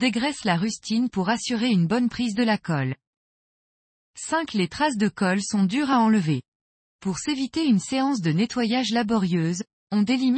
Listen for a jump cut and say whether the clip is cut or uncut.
uncut